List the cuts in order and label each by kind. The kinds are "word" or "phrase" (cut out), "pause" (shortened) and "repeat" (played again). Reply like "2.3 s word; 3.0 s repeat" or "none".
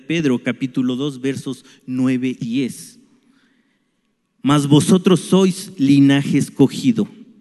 2.4 s word